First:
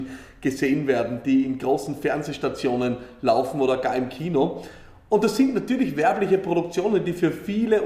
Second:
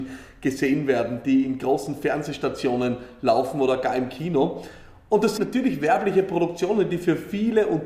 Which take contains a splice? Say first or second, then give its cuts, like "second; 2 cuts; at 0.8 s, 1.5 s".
second; 1 cut; at 5.4 s